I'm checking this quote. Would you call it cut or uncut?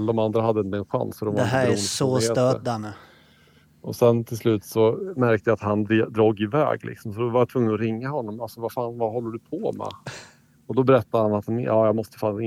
uncut